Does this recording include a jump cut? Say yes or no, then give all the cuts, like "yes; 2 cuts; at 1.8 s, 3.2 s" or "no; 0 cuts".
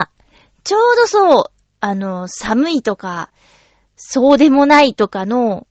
no; 0 cuts